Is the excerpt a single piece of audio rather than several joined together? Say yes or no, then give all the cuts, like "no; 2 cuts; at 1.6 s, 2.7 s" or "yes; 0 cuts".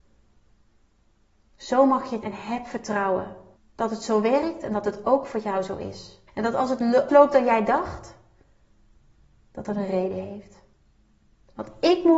no; 4 cuts; at 2.2 s, 3.6 s, 6.3 s, 7.1 s